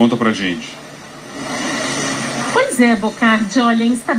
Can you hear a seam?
no; 0 cuts

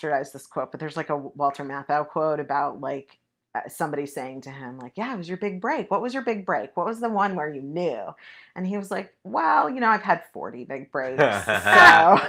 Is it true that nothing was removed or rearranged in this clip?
yes; 0 cuts

